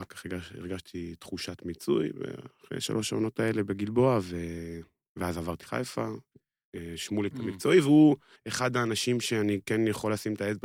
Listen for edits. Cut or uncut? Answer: cut